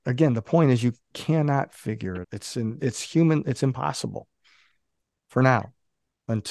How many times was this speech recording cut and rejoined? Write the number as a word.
three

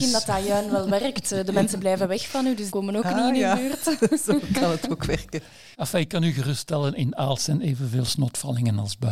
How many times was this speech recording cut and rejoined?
two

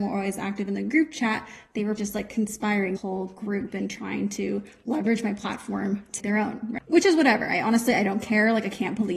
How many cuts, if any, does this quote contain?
three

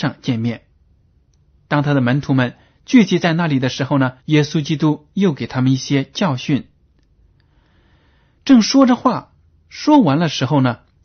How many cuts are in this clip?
one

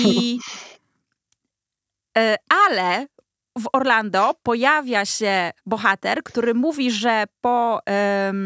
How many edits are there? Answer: one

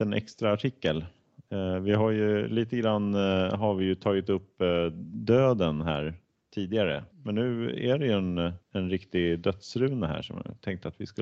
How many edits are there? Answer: two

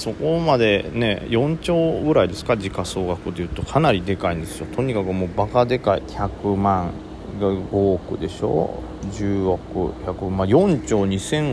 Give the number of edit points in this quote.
one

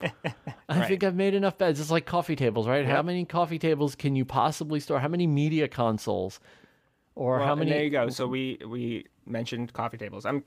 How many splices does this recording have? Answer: zero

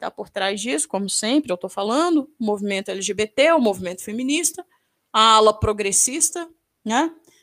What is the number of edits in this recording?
zero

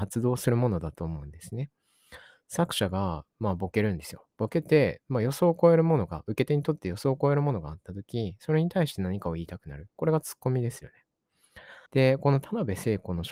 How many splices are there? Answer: one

